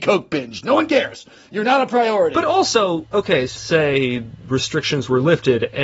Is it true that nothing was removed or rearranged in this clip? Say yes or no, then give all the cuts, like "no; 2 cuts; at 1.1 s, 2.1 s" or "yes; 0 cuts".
no; 2 cuts; at 3.1 s, 3.6 s